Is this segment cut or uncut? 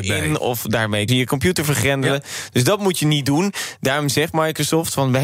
cut